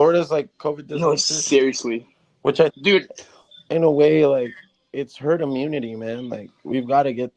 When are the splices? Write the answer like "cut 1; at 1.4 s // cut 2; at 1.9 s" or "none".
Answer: cut 1; at 2.7 s